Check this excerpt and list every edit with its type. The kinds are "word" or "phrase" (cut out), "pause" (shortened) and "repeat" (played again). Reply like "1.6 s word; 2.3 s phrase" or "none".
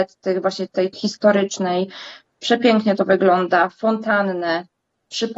0.9 s word